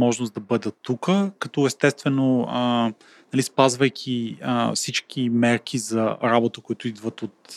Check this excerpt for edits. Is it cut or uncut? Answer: uncut